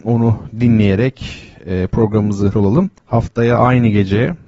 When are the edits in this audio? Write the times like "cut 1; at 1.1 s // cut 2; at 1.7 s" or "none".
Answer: cut 1; at 2.5 s // cut 2; at 3.0 s